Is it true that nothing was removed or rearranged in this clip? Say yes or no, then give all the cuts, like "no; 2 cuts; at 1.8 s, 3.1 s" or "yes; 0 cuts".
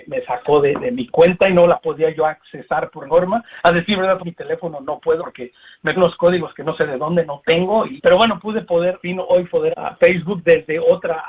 no; 7 cuts; at 3.1 s, 4.2 s, 5.2 s, 6.0 s, 8.0 s, 9.0 s, 9.7 s